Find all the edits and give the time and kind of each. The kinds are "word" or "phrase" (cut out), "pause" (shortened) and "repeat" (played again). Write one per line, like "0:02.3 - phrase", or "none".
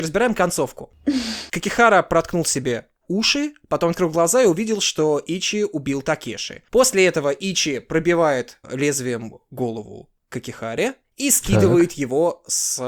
0:01.5 - pause